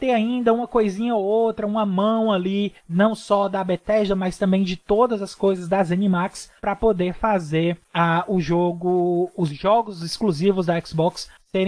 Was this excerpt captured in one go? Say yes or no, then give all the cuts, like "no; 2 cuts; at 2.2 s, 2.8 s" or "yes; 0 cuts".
no; 2 cuts; at 2.8 s, 6.6 s